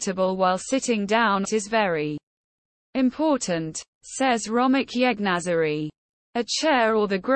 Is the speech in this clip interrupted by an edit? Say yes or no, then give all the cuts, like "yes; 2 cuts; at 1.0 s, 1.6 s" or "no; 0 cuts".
yes; 1 cut; at 1.4 s